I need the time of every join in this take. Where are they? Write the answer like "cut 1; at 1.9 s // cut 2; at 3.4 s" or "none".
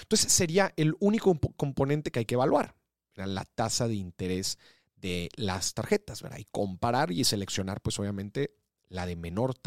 none

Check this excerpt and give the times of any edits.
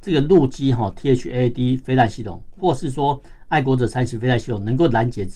none

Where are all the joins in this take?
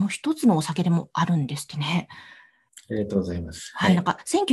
none

